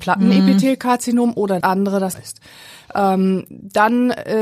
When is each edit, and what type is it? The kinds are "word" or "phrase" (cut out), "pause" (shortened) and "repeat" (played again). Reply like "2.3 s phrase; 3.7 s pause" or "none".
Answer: 1.6 s word; 2.1 s word